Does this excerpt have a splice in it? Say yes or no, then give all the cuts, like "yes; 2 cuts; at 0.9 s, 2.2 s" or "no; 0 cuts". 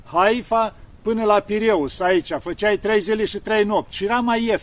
no; 0 cuts